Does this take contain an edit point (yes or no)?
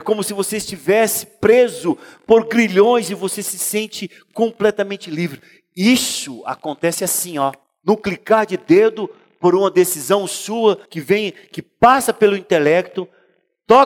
yes